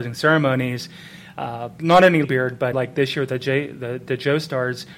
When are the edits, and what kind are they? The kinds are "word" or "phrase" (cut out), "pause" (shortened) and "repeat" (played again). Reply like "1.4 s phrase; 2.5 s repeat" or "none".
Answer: 1.8 s word; 2.2 s word; 2.7 s word